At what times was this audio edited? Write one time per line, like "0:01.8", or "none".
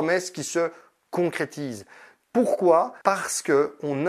0:03.0